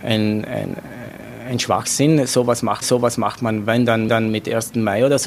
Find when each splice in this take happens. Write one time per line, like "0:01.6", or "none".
0:02.8
0:04.1